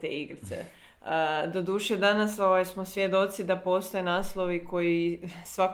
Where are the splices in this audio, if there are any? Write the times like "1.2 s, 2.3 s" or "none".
none